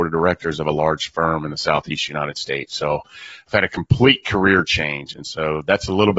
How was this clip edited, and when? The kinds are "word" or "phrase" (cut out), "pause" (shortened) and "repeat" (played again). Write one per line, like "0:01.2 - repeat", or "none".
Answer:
none